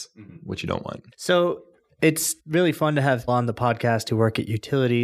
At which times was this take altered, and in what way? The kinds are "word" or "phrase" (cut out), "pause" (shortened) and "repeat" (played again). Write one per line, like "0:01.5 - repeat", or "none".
0:01.1 - pause
0:02.4 - pause
0:03.3 - word